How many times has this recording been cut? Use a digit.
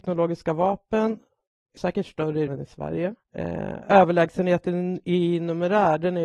3